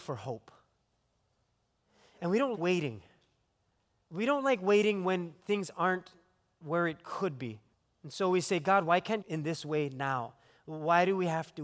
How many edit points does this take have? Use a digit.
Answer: 3